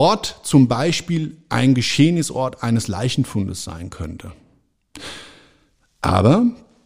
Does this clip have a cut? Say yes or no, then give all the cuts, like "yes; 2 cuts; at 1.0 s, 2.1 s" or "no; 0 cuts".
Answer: no; 0 cuts